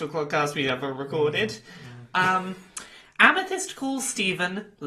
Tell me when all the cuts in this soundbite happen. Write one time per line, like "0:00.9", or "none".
none